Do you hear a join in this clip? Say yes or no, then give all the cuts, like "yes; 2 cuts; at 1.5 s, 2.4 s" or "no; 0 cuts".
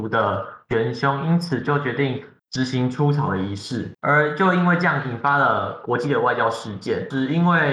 yes; 1 cut; at 2.4 s